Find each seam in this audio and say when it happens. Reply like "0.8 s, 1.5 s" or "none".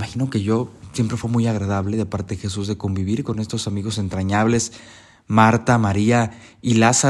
none